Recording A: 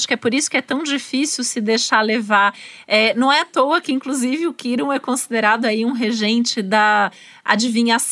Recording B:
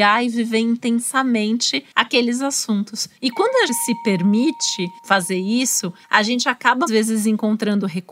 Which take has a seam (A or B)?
B